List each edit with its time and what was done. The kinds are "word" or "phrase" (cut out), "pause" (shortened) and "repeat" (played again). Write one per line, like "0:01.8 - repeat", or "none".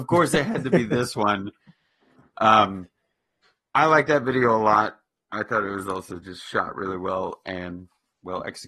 none